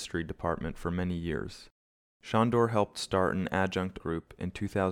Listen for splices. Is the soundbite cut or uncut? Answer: cut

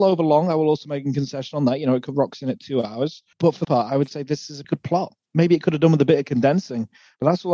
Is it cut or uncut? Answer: cut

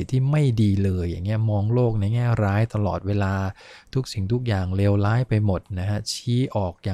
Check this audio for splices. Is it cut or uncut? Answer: uncut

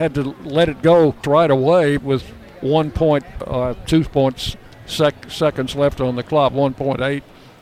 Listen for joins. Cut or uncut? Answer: cut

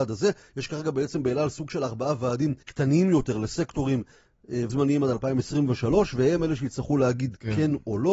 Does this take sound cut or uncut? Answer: cut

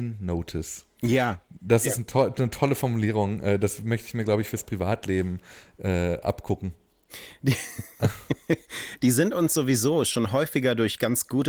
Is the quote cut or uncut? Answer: uncut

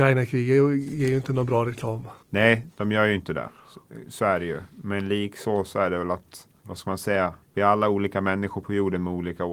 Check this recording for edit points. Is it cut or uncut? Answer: cut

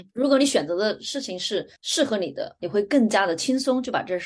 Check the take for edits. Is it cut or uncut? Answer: cut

